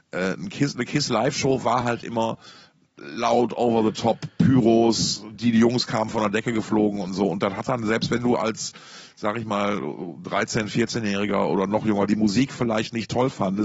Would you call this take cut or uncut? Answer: uncut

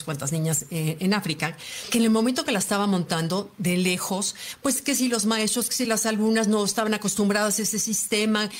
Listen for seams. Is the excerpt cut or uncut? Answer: uncut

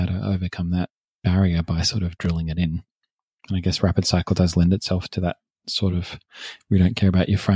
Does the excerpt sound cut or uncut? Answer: uncut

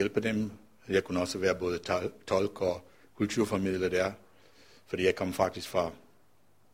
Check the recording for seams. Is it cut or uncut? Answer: uncut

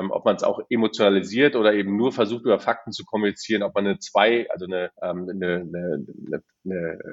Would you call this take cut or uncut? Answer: cut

